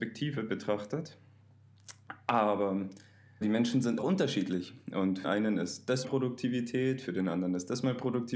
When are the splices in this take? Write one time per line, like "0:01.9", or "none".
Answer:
0:03.4
0:04.0
0:05.2
0:06.0